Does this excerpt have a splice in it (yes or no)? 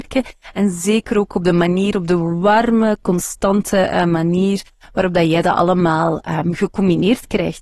no